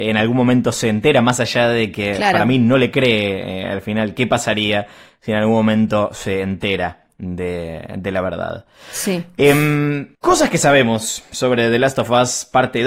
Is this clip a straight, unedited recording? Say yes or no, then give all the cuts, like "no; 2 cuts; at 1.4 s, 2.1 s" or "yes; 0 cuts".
no; 1 cut; at 10.1 s